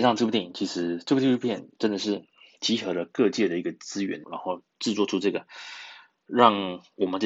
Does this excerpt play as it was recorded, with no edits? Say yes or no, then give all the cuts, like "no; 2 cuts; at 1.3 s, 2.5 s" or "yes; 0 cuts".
no; 1 cut; at 4.2 s